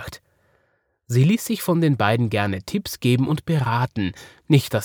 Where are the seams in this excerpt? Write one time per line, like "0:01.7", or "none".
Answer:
none